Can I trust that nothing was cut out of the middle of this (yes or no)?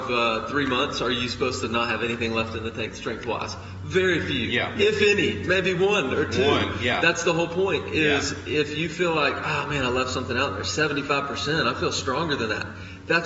yes